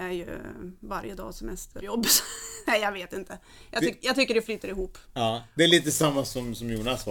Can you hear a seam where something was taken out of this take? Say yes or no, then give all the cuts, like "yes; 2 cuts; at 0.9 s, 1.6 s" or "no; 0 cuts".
yes; 1 cut; at 1.8 s